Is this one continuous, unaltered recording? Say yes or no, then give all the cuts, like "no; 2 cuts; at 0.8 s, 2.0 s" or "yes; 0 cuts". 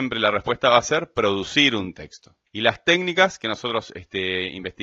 no; 1 cut; at 2.5 s